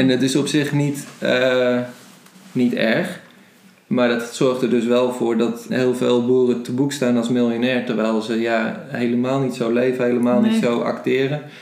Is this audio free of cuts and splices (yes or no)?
no